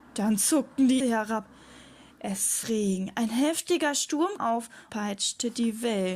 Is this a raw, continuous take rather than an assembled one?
no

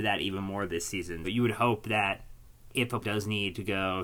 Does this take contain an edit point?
yes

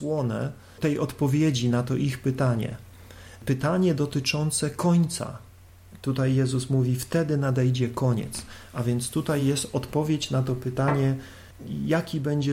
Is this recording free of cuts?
yes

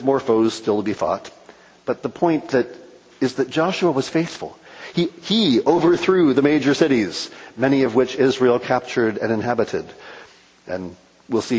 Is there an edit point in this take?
no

